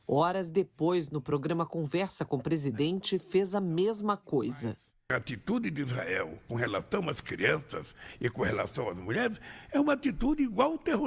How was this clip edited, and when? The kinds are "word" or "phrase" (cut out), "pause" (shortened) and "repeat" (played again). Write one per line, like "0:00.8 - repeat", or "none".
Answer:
none